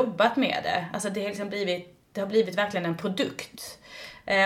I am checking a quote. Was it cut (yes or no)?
no